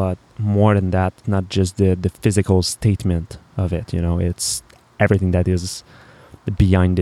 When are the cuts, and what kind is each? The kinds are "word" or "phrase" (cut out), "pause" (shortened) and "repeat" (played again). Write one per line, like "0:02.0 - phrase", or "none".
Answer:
0:01.2 - word